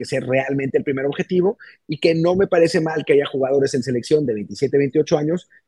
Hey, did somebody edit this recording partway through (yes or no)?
no